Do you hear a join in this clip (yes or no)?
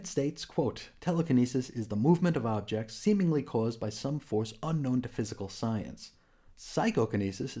no